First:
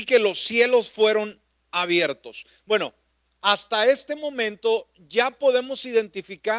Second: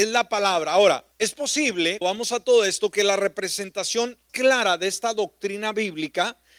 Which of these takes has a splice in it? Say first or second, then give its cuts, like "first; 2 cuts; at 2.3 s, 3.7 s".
second; 3 cuts; at 1.1 s, 2.0 s, 4.3 s